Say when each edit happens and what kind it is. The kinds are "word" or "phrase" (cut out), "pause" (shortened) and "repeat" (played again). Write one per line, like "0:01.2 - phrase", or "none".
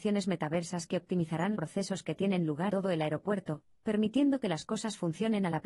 0:01.5 - word
0:02.7 - word